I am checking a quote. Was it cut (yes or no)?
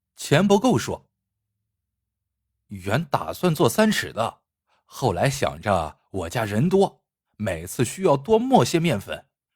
no